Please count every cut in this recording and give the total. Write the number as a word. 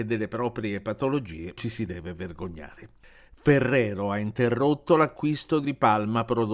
two